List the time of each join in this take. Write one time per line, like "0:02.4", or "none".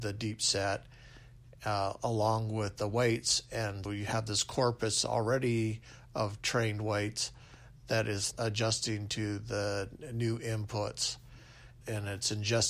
0:03.8
0:08.3
0:11.8